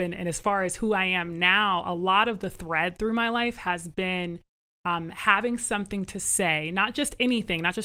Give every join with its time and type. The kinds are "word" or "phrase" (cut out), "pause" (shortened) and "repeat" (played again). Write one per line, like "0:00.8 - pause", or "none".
none